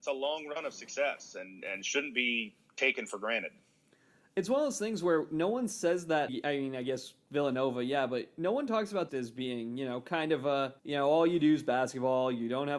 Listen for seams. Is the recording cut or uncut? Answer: cut